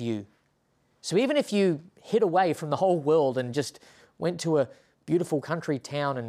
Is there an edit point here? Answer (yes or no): no